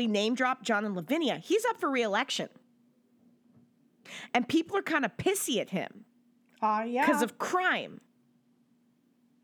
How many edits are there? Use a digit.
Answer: 0